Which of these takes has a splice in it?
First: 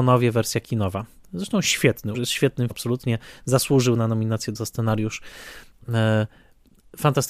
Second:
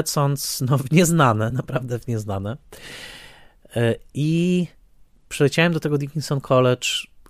first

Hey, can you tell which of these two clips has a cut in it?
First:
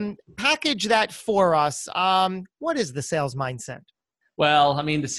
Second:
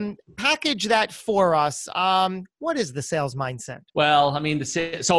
second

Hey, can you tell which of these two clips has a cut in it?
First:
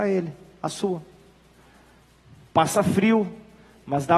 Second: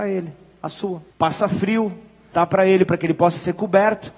second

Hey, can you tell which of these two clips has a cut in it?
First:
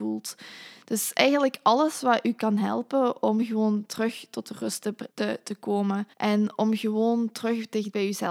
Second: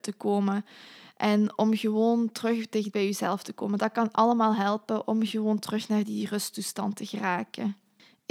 first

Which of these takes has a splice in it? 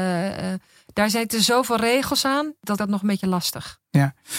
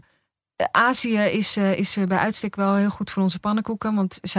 first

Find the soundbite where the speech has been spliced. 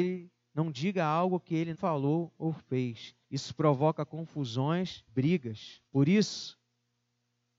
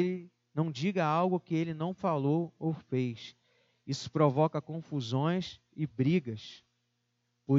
first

